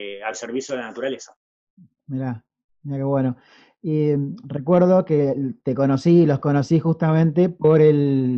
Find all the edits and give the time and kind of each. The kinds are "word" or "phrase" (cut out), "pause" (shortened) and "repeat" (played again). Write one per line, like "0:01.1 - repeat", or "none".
none